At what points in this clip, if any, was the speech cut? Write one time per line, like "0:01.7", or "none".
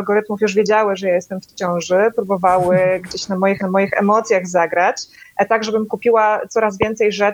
0:03.6